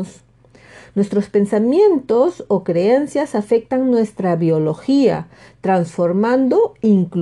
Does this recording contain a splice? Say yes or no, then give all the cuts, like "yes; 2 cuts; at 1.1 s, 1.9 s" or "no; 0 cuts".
no; 0 cuts